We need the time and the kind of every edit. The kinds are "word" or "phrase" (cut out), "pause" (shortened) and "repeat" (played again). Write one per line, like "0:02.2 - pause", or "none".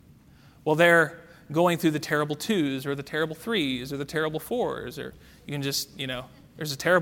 none